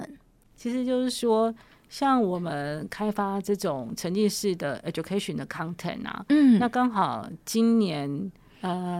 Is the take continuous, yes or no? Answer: yes